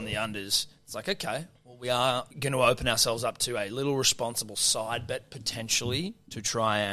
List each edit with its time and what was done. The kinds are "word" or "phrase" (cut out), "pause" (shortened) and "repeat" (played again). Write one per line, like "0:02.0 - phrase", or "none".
0:02.3 - pause